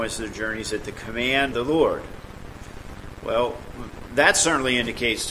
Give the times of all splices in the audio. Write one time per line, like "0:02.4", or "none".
0:01.5